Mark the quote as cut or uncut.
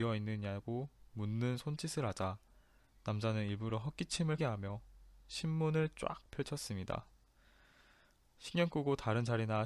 cut